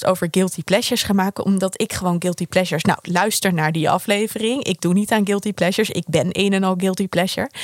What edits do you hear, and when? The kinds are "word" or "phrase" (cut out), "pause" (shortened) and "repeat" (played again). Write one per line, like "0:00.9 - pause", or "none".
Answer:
none